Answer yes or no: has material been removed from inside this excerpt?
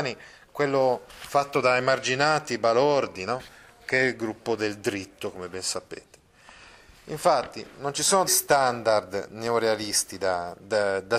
yes